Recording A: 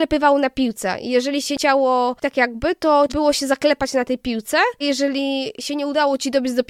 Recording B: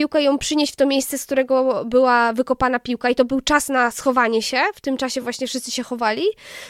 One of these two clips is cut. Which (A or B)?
A